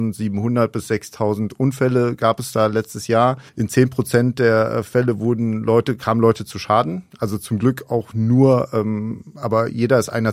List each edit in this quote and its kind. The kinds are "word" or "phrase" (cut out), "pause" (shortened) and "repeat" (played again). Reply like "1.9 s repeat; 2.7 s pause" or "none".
3.5 s pause